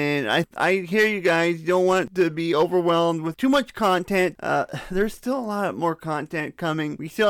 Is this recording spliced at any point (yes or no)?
no